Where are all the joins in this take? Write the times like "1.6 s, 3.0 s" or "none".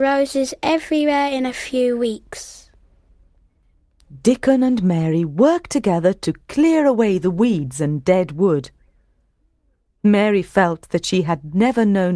none